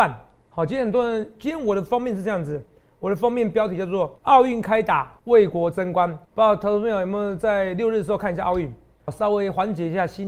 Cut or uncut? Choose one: cut